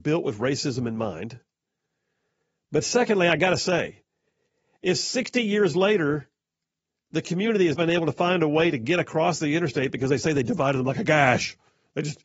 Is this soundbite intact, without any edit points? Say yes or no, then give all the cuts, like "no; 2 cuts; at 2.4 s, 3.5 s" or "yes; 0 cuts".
no; 1 cut; at 7.7 s